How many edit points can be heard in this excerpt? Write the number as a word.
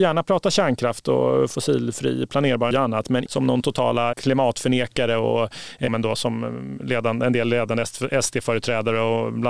four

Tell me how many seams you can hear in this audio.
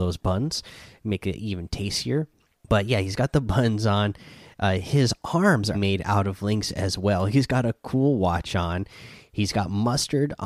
two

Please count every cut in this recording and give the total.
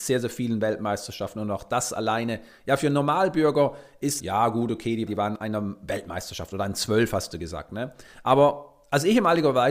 one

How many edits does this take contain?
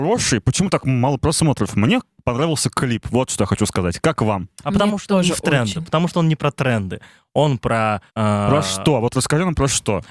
one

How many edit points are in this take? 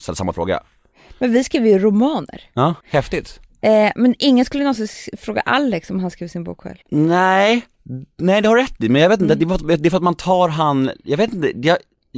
two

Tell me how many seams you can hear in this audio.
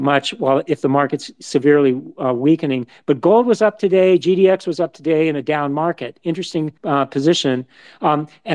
one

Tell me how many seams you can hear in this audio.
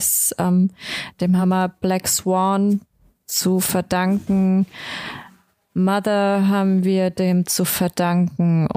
zero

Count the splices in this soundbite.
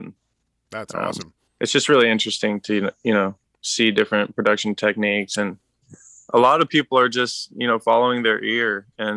one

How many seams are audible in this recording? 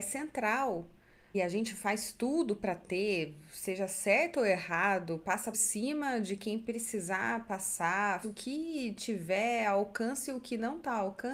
three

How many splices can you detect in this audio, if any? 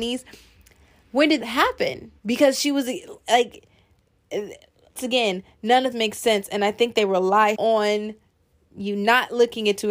five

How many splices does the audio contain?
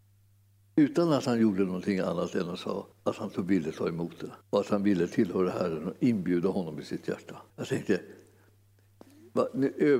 three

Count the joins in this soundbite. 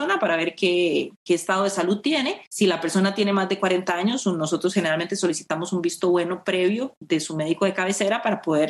one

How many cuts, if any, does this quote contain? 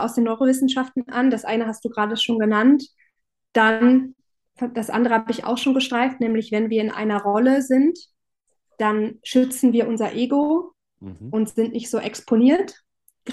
zero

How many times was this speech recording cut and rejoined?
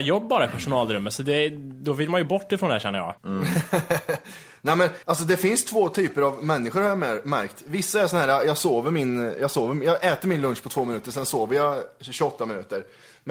two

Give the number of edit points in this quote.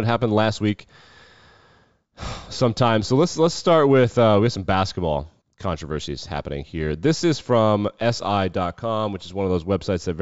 one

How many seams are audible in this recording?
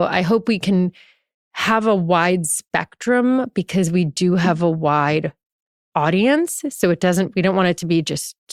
zero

